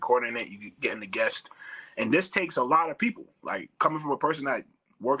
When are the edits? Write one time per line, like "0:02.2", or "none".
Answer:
none